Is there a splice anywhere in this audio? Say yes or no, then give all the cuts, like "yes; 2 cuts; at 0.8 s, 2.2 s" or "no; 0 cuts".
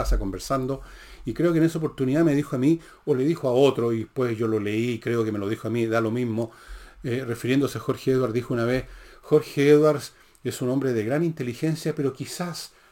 no; 0 cuts